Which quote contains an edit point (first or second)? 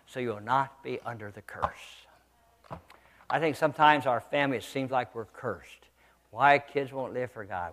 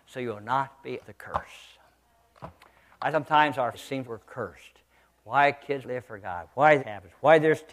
second